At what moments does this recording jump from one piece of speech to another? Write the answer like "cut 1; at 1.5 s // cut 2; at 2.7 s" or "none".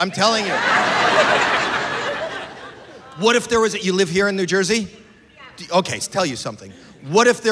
cut 1; at 6.0 s